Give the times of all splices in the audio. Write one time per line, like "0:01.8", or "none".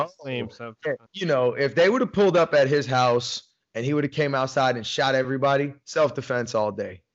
0:01.1